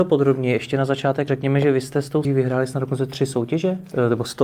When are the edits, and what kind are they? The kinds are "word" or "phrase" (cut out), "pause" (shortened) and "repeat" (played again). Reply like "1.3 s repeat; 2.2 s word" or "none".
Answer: 1.3 s word; 2.2 s word